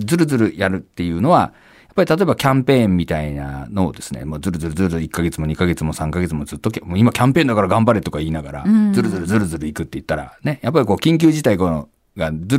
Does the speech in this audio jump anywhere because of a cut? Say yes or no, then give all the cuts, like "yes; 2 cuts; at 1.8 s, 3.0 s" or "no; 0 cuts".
no; 0 cuts